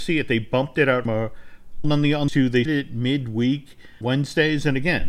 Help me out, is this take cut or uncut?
cut